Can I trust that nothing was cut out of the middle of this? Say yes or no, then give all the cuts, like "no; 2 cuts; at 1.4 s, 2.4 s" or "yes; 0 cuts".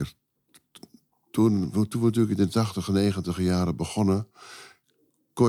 yes; 0 cuts